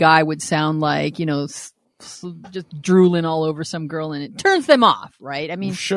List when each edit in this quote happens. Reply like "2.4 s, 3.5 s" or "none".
none